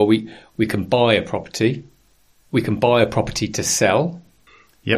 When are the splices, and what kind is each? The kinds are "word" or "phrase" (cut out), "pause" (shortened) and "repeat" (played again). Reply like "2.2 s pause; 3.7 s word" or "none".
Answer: none